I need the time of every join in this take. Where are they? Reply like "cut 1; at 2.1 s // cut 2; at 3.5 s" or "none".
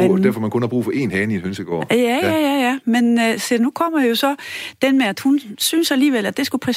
none